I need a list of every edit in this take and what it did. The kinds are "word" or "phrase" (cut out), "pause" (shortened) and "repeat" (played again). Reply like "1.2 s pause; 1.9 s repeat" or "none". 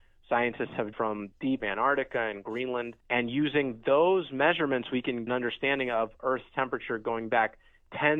0.9 s word; 1.6 s phrase; 3.0 s pause; 5.3 s phrase